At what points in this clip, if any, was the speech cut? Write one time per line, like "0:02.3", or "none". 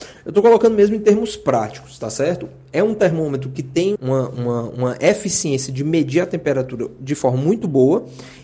0:04.0

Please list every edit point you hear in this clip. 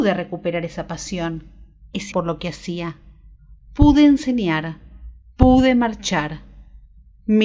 0:02.1

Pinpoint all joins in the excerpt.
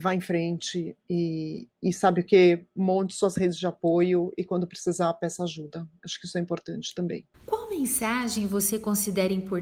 0:01.7
0:07.3

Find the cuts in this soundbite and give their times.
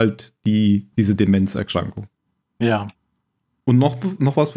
0:00.9
0:02.3

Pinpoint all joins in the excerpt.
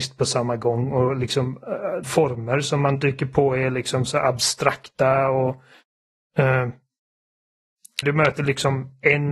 0:02.0
0:08.0

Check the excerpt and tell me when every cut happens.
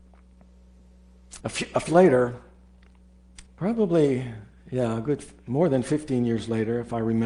0:01.4
0:01.9
0:03.5

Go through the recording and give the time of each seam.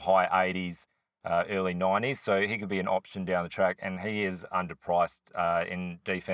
none

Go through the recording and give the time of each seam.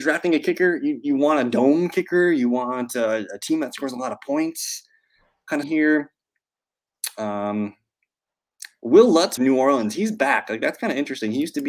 0:05.6
0:09.4

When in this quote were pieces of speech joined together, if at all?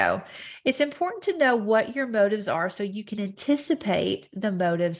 none

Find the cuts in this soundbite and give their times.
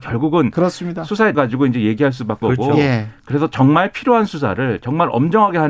0:01.3
0:02.4

